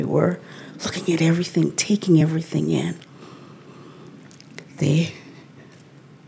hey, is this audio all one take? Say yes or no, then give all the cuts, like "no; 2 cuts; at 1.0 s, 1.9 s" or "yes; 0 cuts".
yes; 0 cuts